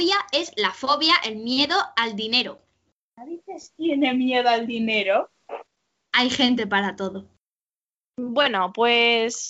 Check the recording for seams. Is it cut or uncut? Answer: uncut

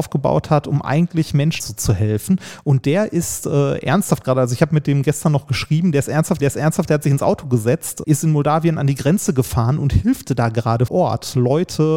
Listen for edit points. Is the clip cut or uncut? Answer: cut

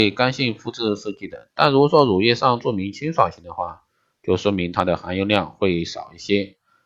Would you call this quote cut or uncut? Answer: uncut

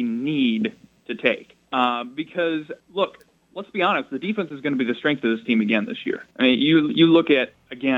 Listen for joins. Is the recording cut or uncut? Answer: cut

